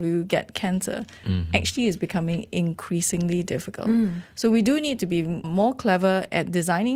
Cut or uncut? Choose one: cut